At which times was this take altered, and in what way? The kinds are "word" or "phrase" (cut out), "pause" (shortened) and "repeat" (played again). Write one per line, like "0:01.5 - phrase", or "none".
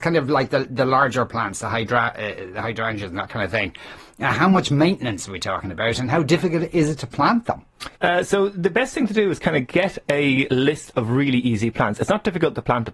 0:07.9 - pause